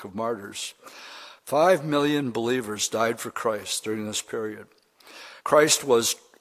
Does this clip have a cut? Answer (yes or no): yes